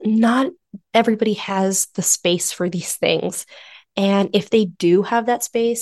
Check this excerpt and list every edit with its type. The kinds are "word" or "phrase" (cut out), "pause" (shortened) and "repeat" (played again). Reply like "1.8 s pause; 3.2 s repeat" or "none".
none